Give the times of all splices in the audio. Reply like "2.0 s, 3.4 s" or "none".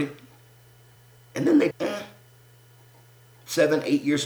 1.0 s, 1.7 s